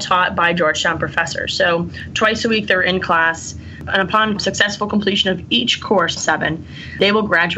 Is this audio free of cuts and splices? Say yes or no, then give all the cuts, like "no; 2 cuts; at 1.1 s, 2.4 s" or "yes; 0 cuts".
no; 1 cut; at 6.2 s